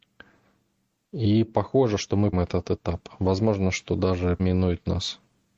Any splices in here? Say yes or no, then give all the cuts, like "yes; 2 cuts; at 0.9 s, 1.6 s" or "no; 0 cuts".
yes; 2 cuts; at 2.3 s, 4.4 s